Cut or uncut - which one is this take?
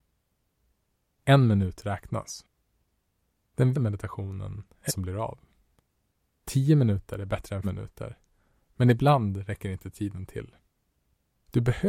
cut